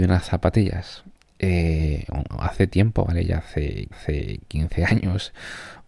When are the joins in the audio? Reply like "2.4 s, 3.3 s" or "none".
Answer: 1.2 s, 3.9 s